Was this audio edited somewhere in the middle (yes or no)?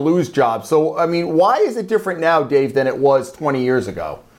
no